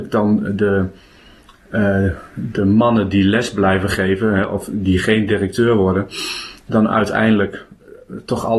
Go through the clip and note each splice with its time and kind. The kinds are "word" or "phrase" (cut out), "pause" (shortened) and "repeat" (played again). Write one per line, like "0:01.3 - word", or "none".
none